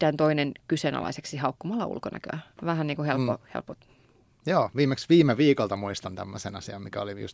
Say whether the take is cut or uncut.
uncut